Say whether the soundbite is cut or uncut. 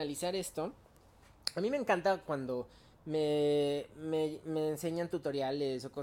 uncut